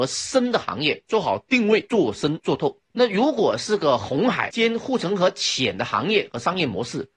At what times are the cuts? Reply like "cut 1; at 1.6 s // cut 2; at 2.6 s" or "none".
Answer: cut 1; at 2.9 s